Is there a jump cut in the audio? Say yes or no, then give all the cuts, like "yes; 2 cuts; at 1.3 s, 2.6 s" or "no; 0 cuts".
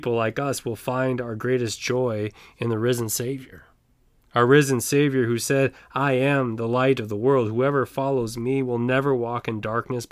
no; 0 cuts